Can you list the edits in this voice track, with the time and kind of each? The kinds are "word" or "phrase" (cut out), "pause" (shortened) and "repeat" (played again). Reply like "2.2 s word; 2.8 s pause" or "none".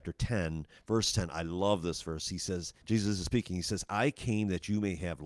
2.8 s pause